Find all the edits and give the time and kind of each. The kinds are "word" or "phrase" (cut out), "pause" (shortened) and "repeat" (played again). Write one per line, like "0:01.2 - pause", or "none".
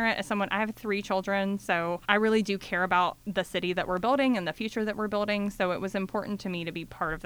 0:02.0 - pause